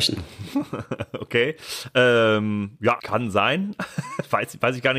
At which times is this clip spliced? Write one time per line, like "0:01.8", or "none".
0:03.0